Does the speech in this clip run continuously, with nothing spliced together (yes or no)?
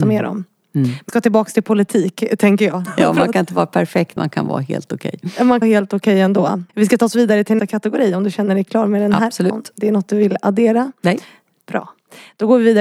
no